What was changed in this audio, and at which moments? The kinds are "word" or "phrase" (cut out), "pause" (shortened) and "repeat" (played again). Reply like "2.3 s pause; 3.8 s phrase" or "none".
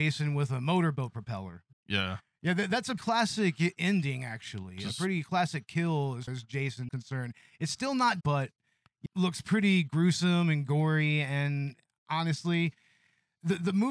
1.7 s pause; 3.0 s word; 6.3 s word; 6.9 s word; 8.2 s word; 9.1 s phrase